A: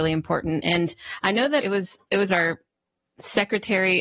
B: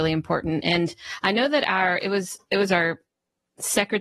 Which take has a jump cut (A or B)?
A